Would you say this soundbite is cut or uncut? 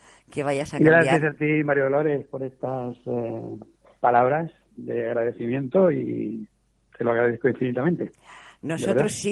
uncut